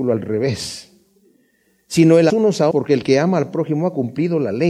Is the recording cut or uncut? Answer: cut